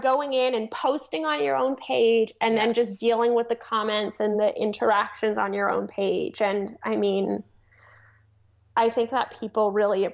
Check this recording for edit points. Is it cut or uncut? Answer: uncut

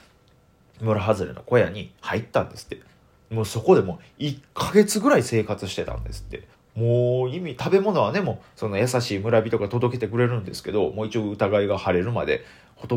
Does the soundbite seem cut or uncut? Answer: cut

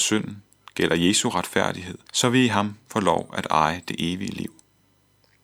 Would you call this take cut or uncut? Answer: cut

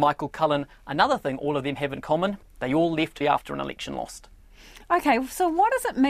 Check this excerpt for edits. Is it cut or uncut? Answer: cut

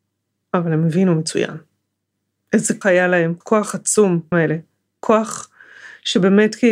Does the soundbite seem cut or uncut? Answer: cut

